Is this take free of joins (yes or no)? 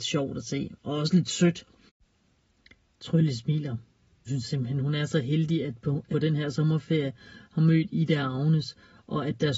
no